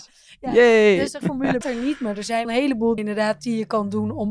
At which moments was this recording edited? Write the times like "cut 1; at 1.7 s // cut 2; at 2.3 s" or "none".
cut 1; at 1.2 s // cut 2; at 1.6 s // cut 3; at 2.4 s // cut 4; at 3.0 s